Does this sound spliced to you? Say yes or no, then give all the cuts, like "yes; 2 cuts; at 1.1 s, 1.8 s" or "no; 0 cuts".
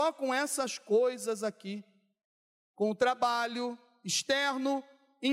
no; 0 cuts